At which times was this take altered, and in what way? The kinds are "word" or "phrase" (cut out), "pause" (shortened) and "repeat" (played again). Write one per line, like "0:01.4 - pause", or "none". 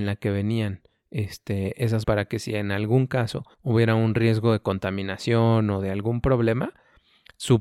0:02.0 - word
0:03.5 - pause